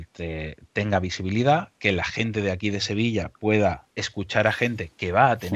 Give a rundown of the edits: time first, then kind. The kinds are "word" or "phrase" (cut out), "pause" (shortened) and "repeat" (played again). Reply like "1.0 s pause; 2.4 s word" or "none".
3.9 s pause